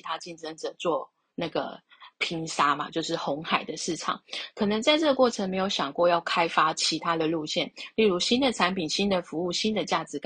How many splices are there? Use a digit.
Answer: 0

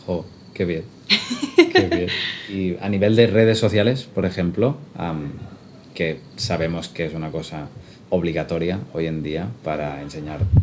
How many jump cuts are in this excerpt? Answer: 0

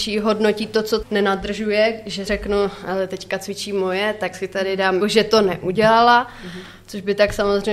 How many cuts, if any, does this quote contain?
4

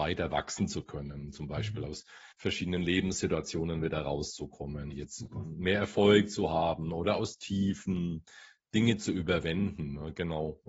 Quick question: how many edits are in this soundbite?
2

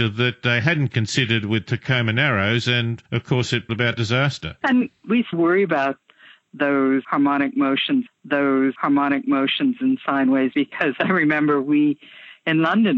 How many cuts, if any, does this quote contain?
4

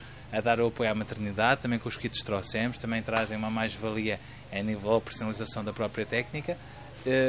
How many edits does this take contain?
0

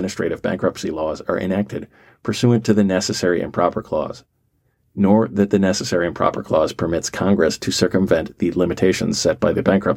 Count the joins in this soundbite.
0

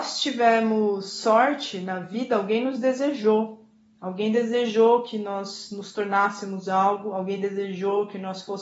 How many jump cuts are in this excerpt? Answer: 0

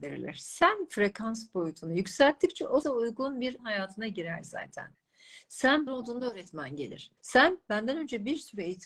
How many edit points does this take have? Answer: 4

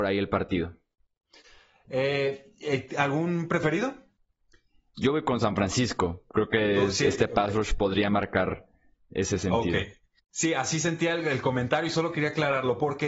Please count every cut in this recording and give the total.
0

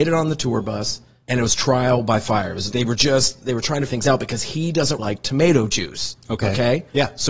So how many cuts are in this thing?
3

